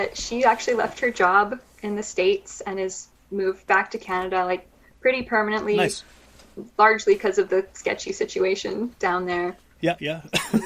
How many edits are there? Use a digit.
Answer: 0